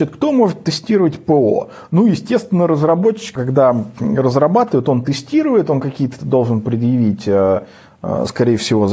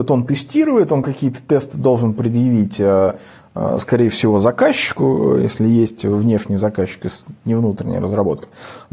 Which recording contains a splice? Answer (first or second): first